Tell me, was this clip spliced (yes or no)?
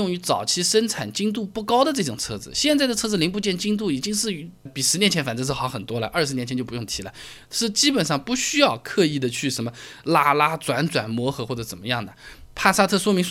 yes